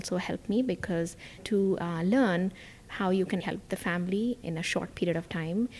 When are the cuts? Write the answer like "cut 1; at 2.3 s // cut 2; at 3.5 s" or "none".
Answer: cut 1; at 1.4 s // cut 2; at 3.4 s // cut 3; at 4.4 s